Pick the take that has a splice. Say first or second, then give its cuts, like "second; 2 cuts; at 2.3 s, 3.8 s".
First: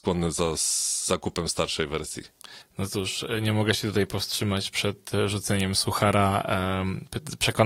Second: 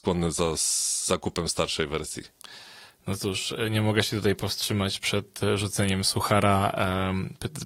first; 1 cut; at 2.6 s